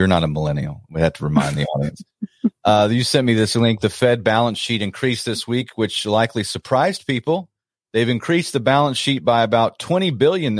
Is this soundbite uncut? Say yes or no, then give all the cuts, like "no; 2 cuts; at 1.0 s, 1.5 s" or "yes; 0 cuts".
yes; 0 cuts